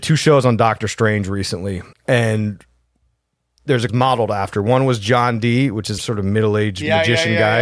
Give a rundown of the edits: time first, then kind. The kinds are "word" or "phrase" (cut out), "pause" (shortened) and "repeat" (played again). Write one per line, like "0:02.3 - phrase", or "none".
0:01.9 - pause
0:03.9 - phrase
0:06.0 - word